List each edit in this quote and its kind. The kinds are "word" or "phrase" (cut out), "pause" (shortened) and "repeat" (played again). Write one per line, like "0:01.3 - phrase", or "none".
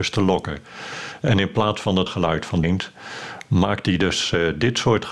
0:02.1 - word
0:02.6 - word